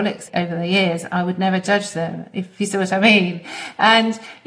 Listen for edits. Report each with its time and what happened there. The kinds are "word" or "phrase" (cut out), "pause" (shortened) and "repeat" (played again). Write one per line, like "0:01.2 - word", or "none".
none